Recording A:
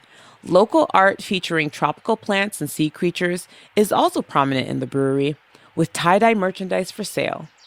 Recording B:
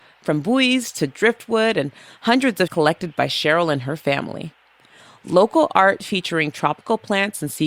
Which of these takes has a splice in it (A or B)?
B